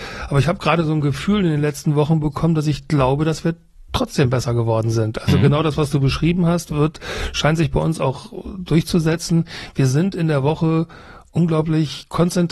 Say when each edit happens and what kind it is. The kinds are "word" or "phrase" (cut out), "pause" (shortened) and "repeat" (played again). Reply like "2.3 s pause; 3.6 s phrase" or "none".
none